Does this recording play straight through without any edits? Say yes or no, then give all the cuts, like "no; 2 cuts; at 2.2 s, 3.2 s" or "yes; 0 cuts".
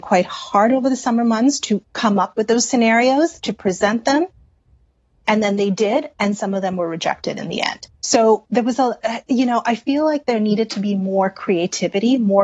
no; 1 cut; at 7.9 s